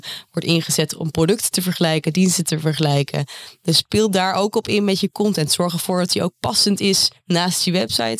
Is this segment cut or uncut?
uncut